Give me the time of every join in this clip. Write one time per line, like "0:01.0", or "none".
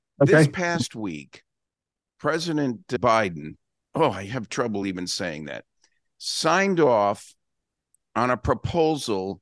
none